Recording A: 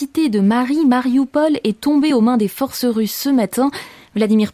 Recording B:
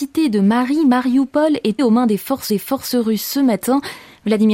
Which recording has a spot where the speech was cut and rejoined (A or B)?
B